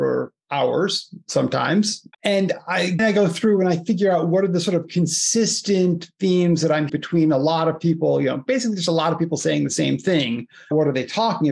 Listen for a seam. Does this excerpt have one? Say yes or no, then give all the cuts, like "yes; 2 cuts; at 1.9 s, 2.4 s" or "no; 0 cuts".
yes; 3 cuts; at 2.1 s, 3.0 s, 6.9 s